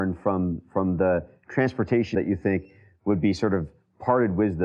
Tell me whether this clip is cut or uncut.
cut